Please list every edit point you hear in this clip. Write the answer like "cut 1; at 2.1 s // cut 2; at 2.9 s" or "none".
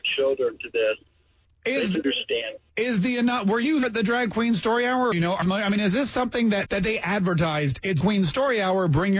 cut 1; at 1.9 s // cut 2; at 3.8 s // cut 3; at 5.1 s // cut 4; at 5.4 s // cut 5; at 6.7 s // cut 6; at 8.0 s